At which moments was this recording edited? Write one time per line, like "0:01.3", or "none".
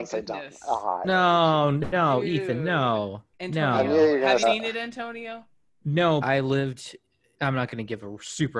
0:03.3
0:04.4
0:06.2